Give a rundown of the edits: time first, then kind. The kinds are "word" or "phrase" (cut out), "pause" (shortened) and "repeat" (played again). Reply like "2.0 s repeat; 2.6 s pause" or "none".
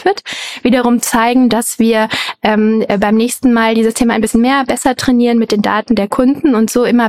none